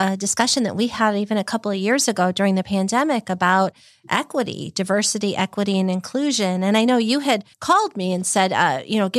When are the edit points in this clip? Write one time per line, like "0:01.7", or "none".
0:07.5